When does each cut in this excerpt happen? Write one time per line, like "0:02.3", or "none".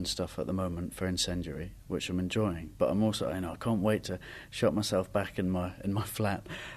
none